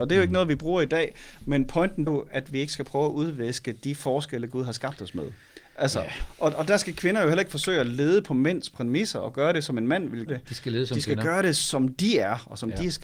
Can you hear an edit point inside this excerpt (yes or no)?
yes